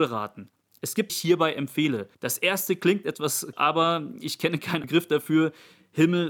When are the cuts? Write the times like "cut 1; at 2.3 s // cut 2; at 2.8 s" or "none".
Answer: cut 1; at 1.1 s // cut 2; at 2.1 s // cut 3; at 3.5 s // cut 4; at 4.8 s